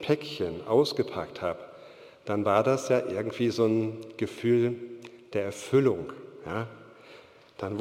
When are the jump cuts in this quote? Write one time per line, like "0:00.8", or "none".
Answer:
none